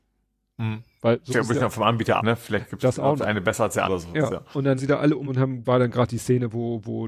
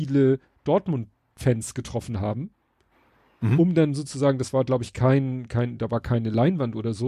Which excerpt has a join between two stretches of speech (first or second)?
first